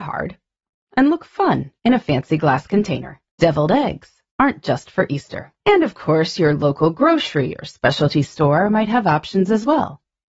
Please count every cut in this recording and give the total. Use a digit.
4